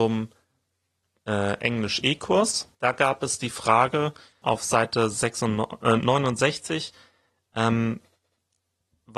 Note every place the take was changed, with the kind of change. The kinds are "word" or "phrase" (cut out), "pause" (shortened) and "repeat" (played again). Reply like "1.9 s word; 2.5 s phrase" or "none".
2.7 s pause; 4.4 s word